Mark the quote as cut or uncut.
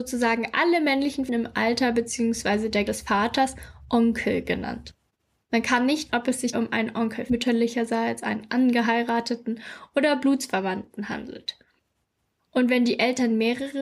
cut